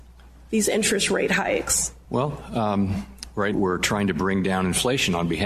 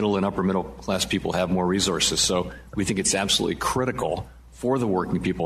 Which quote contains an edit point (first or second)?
first